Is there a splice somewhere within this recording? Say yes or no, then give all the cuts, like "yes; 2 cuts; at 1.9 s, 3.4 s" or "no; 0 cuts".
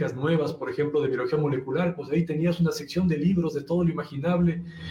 no; 0 cuts